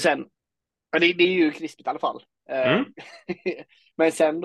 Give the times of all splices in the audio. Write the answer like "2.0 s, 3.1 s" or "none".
2.9 s